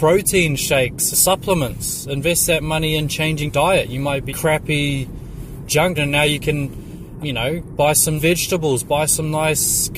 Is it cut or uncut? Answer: cut